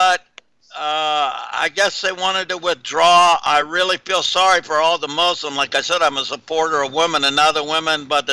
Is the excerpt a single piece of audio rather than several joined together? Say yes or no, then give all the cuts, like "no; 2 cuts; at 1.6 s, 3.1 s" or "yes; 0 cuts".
yes; 0 cuts